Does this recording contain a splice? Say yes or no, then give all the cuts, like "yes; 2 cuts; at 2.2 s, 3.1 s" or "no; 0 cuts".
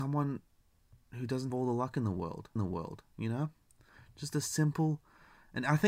yes; 2 cuts; at 1.5 s, 2.6 s